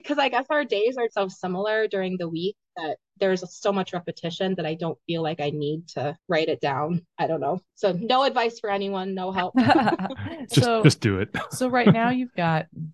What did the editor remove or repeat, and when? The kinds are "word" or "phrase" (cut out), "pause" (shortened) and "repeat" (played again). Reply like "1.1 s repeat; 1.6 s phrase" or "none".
1.1 s word; 6.2 s pause; 7.7 s pause